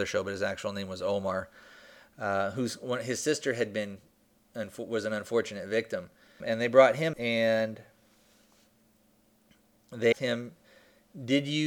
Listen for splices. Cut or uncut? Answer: cut